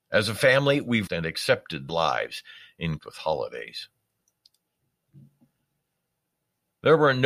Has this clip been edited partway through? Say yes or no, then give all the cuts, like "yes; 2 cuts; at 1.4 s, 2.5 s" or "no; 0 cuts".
yes; 3 cuts; at 1.1 s, 1.9 s, 3.0 s